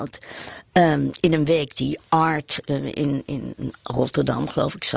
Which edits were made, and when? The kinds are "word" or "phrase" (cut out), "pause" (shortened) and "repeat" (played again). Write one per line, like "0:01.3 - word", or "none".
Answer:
none